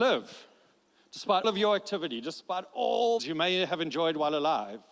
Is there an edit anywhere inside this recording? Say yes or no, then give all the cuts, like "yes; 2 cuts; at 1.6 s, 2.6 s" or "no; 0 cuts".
yes; 2 cuts; at 1.4 s, 3.2 s